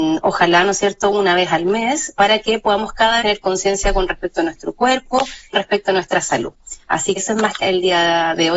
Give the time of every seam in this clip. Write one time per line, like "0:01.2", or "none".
0:02.2
0:03.2
0:05.5
0:07.2
0:07.6